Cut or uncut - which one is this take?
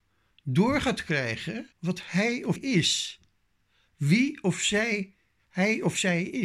cut